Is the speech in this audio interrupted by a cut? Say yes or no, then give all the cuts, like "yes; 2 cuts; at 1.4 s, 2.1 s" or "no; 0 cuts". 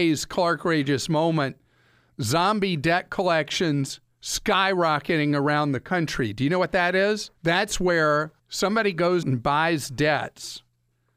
yes; 3 cuts; at 7.4 s, 8.4 s, 9.2 s